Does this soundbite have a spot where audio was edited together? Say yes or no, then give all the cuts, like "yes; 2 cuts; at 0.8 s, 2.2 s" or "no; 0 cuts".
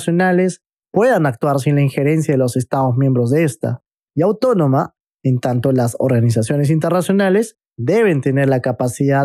no; 0 cuts